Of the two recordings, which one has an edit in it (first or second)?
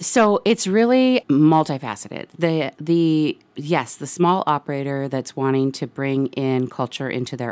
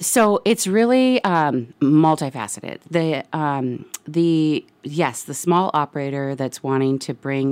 first